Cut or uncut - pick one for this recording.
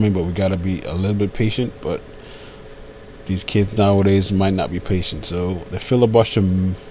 uncut